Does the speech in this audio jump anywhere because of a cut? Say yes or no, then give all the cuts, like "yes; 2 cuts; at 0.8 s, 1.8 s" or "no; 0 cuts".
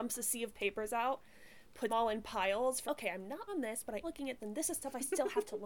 yes; 5 cuts; at 1.9 s, 2.9 s, 3.5 s, 4.0 s, 4.4 s